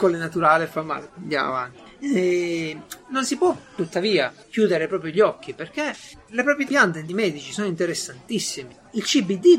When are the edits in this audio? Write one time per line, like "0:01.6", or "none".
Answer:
0:01.1
0:04.4
0:06.7
0:07.1